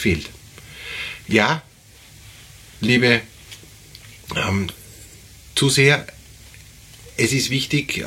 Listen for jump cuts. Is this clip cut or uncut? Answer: uncut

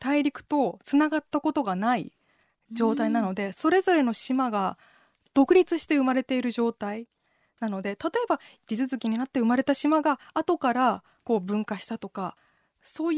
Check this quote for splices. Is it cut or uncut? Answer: uncut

